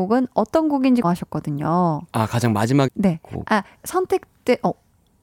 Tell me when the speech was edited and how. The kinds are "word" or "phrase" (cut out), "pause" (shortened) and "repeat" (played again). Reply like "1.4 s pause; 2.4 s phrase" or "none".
1.0 s word; 2.9 s word

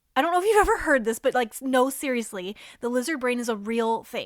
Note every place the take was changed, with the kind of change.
none

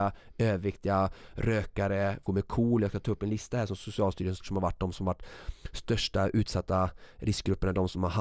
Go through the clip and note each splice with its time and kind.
2.3 s word; 4.4 s word

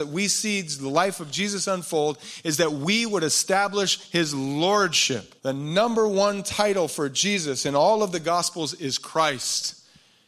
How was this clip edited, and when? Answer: 5.4 s pause

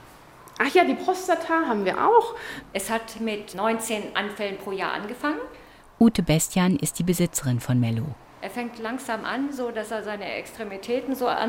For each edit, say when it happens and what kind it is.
none

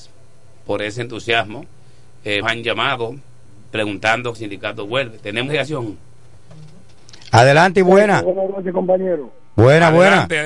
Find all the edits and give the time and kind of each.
2.4 s word; 4.3 s phrase; 5.5 s word

